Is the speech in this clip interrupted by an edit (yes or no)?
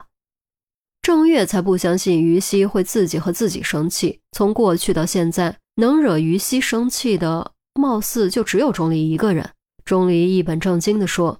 yes